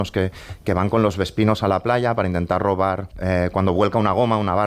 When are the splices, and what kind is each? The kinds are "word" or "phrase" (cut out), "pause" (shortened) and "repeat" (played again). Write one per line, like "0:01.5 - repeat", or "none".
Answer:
0:03.1 - pause